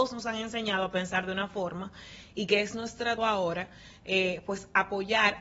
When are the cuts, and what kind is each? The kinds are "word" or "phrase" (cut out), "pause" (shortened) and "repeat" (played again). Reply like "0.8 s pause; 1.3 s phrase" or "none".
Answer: 3.2 s word